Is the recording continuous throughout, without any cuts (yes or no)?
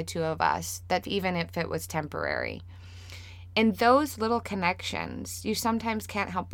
no